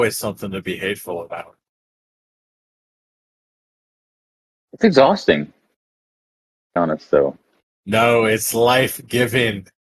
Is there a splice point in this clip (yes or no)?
yes